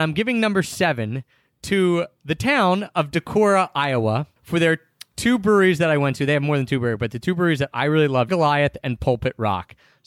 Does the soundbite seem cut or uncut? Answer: cut